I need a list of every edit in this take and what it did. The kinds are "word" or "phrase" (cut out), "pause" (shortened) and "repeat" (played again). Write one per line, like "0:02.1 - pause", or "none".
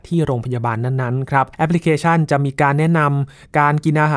0:01.5 - pause